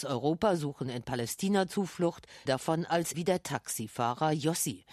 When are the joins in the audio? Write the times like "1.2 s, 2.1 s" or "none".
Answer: 2.5 s, 3.1 s